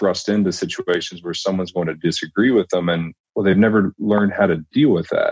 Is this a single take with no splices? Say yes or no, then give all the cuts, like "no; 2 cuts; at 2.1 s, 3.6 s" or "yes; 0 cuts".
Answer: yes; 0 cuts